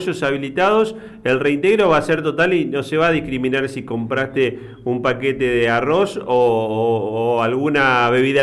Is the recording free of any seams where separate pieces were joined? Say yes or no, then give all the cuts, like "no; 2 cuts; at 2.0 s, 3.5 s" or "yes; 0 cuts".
yes; 0 cuts